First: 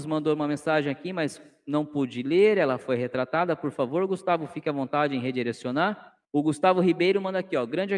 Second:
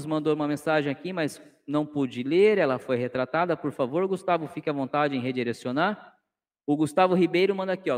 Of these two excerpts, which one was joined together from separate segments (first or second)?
first